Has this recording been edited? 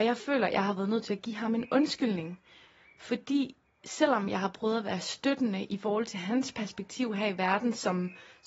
no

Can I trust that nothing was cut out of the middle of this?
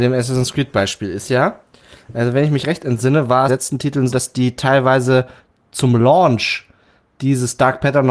no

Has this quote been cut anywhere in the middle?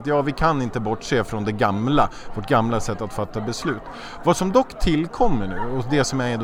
no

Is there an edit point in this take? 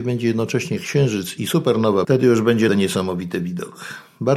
yes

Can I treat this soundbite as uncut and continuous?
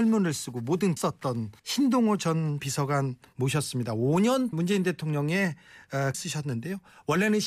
no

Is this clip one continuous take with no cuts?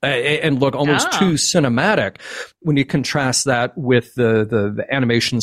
yes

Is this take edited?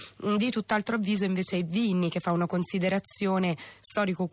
no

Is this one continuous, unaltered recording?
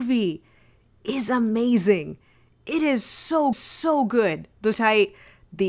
no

